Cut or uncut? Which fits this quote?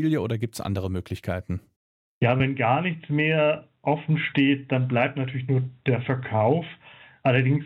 uncut